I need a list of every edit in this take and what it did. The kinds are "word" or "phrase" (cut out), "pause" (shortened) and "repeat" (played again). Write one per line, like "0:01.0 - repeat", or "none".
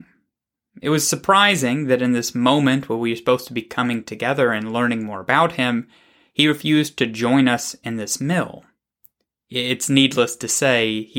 none